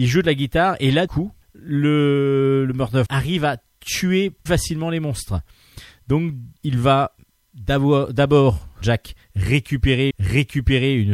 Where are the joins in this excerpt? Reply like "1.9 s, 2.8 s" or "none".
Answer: 1.1 s, 1.4 s, 3.1 s, 4.5 s, 6.6 s, 8.8 s, 10.1 s